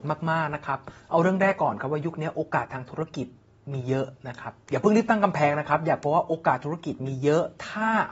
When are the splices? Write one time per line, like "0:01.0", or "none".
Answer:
none